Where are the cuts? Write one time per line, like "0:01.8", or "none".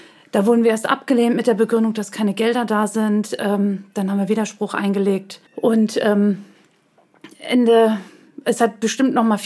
0:05.5

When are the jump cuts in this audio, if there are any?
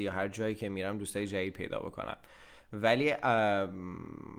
none

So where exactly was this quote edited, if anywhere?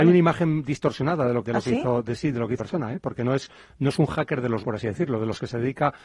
0:01.4
0:02.6
0:04.6

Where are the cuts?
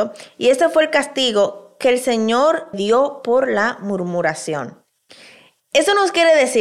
0:02.7
0:05.1

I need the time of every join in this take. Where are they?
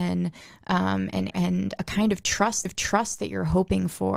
0:01.3
0:02.6

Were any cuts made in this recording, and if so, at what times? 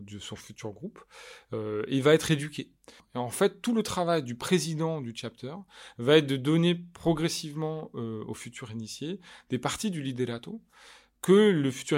none

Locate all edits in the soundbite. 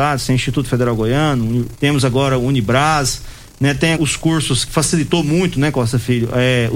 0:01.7
0:04.0
0:04.7

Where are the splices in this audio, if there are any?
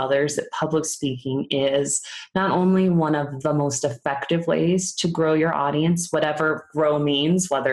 none

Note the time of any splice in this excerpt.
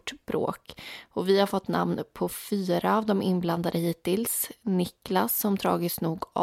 none

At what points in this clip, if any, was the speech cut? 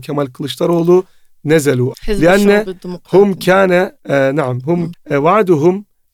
0:01.9
0:04.0
0:04.9

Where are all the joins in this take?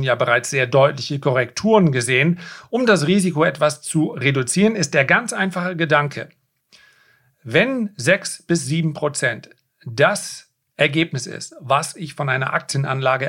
none

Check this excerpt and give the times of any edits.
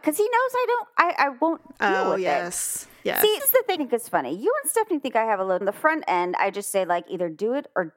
0:03.4
0:03.8
0:05.6

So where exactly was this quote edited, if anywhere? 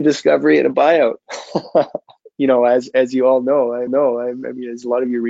0:03.9

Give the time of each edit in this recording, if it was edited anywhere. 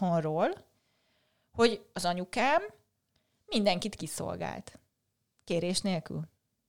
none

